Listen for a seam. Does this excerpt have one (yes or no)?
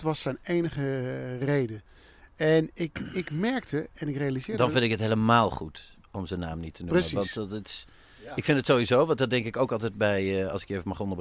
no